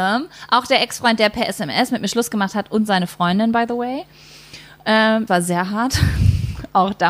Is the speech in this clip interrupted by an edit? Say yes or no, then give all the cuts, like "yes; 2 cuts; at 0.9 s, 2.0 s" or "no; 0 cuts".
yes; 1 cut; at 5.3 s